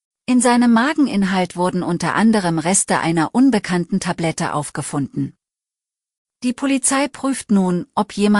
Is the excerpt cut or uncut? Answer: uncut